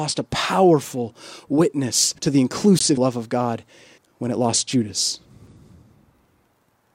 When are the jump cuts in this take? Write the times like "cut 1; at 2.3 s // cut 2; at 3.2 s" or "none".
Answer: cut 1; at 2.2 s // cut 2; at 3.0 s // cut 3; at 4.0 s